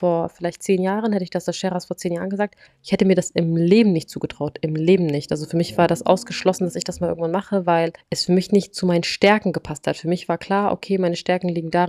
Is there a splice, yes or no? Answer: yes